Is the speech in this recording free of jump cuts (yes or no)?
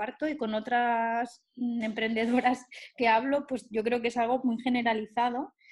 yes